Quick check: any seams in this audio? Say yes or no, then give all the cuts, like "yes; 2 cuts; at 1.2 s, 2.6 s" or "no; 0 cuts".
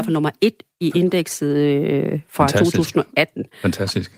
no; 0 cuts